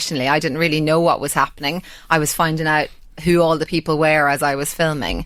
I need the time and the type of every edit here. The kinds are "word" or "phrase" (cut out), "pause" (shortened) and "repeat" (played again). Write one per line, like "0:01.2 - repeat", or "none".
none